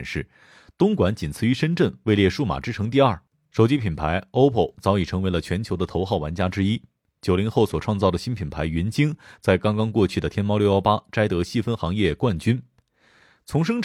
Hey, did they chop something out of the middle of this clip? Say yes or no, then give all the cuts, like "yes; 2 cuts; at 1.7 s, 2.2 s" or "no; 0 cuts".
yes; 1 cut; at 4.7 s